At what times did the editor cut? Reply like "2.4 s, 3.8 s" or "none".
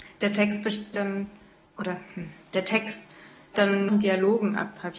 0.9 s, 1.6 s, 3.5 s, 3.9 s